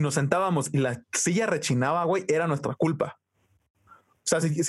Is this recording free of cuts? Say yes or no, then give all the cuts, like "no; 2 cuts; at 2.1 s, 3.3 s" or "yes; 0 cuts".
yes; 0 cuts